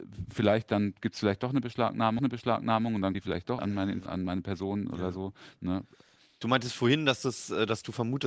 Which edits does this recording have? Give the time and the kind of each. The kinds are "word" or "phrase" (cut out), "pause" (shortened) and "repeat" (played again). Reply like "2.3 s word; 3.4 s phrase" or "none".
2.2 s repeat; 3.1 s word; 3.6 s word; 4.1 s word